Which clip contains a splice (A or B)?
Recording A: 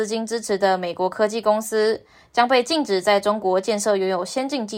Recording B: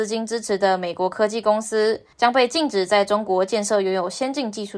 B